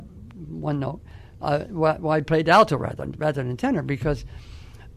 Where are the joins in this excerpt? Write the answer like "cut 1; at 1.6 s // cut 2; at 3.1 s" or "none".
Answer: none